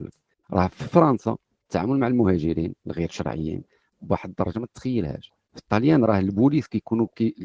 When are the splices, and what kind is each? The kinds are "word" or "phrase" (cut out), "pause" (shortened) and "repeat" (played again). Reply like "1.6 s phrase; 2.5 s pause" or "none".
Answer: 3.9 s word